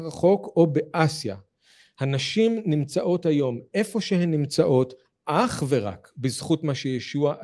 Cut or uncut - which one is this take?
uncut